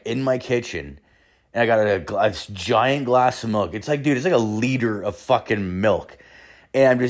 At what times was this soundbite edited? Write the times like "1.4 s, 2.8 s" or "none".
none

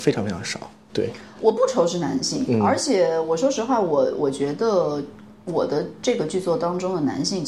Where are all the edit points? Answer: none

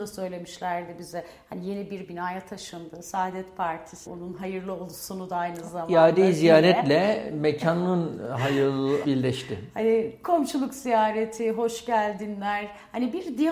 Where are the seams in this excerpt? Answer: 4.1 s, 9.0 s

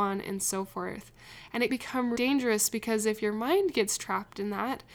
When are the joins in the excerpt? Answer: 1.7 s, 2.2 s

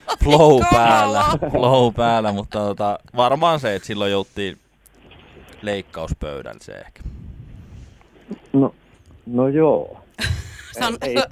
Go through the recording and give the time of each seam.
6.6 s, 8.5 s

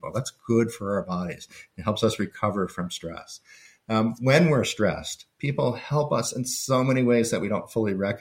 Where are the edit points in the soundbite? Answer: none

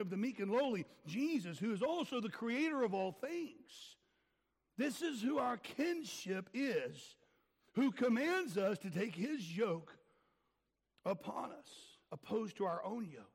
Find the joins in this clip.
none

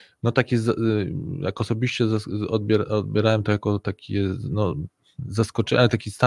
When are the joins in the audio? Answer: none

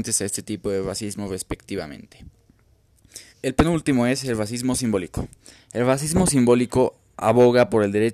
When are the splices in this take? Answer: 3.3 s

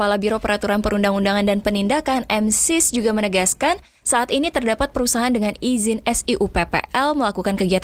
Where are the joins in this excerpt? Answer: none

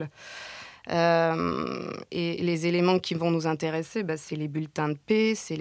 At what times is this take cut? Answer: 4.3 s

